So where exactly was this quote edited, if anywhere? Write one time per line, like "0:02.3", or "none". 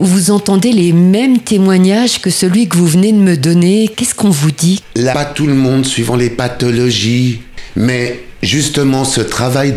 0:05.1